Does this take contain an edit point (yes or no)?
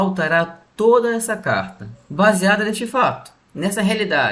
no